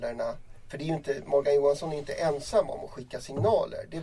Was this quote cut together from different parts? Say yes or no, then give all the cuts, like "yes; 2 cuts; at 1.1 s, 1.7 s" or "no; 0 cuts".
no; 0 cuts